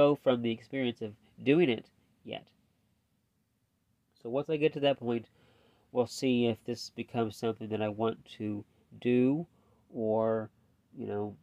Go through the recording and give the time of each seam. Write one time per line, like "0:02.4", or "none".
none